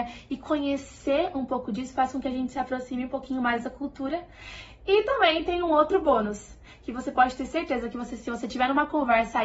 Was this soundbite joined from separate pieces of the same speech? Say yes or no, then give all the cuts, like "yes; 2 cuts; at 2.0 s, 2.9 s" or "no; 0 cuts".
no; 0 cuts